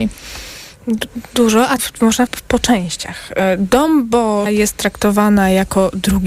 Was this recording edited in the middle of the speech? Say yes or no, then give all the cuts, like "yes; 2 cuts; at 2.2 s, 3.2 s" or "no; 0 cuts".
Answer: yes; 3 cuts; at 1.8 s, 2.3 s, 4.5 s